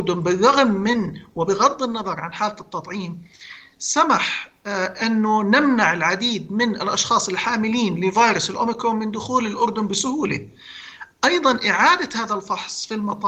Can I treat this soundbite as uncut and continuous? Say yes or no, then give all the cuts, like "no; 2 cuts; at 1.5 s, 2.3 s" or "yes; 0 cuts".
yes; 0 cuts